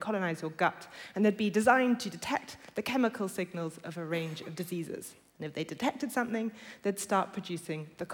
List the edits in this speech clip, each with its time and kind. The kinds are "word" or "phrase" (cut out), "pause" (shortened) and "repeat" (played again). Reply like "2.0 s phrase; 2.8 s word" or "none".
none

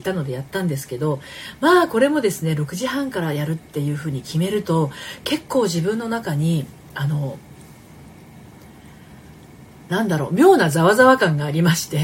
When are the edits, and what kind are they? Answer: none

